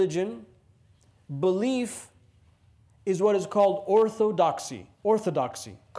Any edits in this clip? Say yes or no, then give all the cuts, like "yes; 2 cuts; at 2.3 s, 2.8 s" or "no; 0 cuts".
yes; 1 cut; at 4.9 s